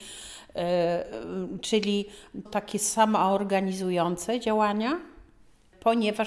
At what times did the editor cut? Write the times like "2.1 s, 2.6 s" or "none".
2.5 s